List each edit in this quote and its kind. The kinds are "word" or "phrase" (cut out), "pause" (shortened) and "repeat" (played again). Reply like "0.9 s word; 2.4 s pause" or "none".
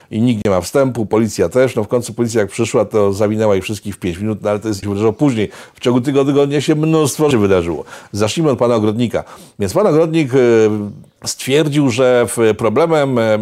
4.8 s phrase; 7.3 s word; 11.2 s pause